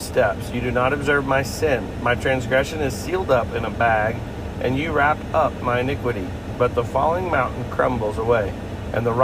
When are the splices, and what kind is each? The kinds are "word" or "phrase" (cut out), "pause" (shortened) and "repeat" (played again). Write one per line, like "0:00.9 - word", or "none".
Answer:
none